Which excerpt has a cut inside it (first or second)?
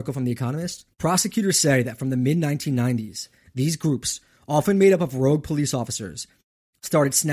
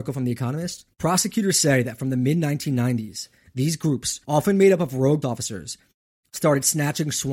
second